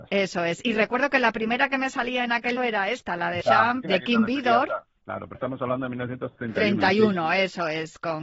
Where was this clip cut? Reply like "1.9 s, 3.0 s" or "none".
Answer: 2.6 s, 3.4 s, 3.8 s, 5.0 s, 5.3 s